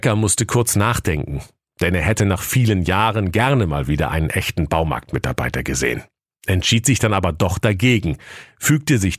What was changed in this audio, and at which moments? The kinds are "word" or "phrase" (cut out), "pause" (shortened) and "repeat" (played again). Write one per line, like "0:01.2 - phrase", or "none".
none